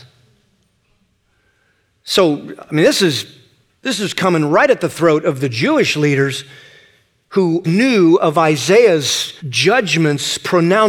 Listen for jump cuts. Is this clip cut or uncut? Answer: cut